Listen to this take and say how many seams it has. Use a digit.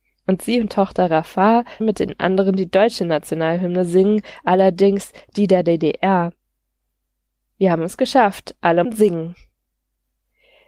2